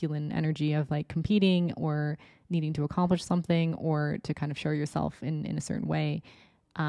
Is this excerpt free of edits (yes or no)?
yes